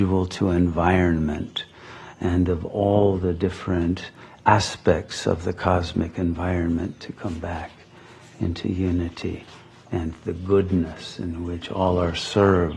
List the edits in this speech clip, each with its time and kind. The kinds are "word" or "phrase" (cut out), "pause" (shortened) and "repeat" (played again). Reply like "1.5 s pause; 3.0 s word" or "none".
none